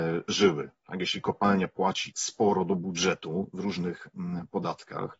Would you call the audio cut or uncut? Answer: cut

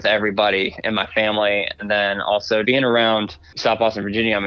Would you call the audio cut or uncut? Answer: cut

